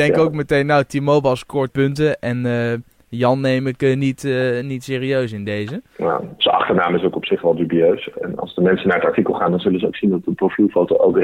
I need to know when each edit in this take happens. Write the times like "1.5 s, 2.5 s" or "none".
1.7 s

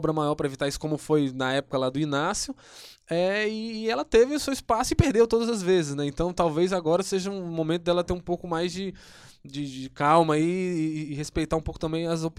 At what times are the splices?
none

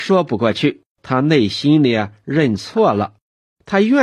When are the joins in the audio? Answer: 0.9 s

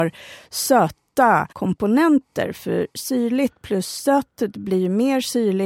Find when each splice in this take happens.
1.5 s

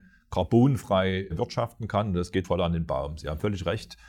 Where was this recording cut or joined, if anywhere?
2.4 s

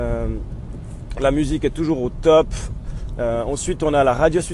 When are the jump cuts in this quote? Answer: none

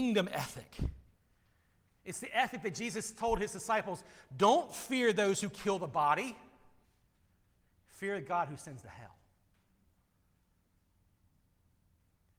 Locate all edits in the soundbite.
none

